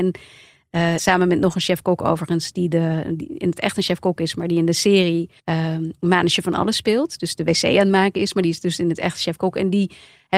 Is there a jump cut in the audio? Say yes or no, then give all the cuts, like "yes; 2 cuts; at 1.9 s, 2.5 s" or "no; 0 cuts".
yes; 2 cuts; at 1.0 s, 5.4 s